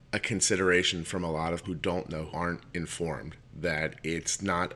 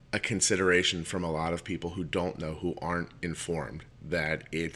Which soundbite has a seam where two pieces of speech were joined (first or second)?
first